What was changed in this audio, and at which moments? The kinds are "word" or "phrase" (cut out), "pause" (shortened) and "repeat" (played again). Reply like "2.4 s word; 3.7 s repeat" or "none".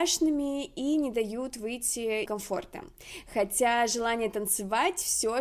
2.3 s phrase